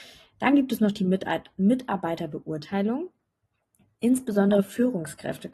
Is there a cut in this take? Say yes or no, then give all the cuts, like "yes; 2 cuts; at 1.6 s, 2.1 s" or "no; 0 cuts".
no; 0 cuts